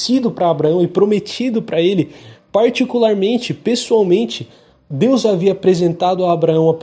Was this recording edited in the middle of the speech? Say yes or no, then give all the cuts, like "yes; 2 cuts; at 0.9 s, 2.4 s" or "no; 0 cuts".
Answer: no; 0 cuts